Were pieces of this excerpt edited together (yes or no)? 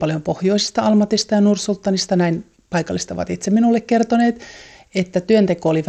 no